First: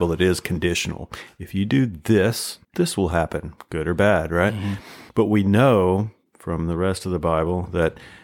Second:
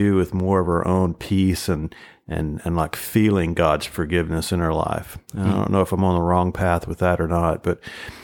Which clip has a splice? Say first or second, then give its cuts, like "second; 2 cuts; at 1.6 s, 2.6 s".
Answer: first; 2 cuts; at 2.6 s, 5.1 s